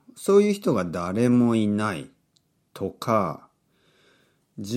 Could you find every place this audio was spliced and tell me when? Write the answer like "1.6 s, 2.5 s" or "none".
none